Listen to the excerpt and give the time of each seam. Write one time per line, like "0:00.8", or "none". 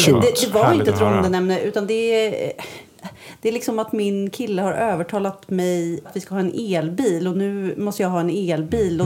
0:06.0